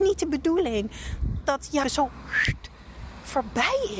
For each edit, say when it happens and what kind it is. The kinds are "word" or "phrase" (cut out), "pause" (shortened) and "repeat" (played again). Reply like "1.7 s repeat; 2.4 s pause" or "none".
1.4 s word; 1.8 s word